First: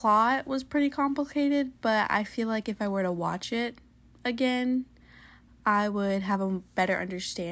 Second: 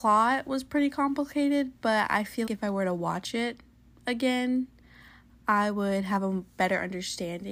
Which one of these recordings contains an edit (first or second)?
second